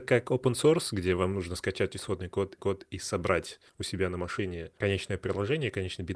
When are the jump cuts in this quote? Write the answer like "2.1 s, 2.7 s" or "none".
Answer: 2.6 s, 3.7 s